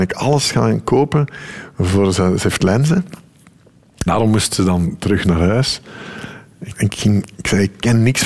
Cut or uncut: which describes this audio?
cut